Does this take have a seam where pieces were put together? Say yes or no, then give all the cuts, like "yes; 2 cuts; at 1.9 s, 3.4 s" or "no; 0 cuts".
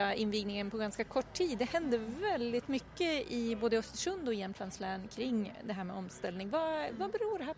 no; 0 cuts